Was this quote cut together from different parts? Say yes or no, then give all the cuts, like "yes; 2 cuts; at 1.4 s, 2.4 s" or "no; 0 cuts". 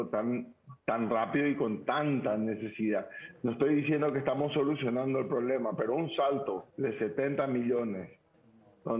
yes; 1 cut; at 6.7 s